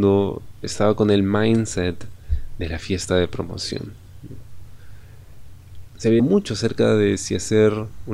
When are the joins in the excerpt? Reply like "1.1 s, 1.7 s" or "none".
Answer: 6.2 s